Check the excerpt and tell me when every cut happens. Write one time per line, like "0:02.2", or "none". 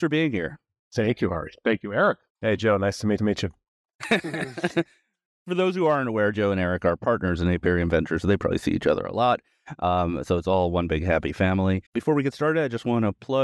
0:02.3
0:03.2
0:11.8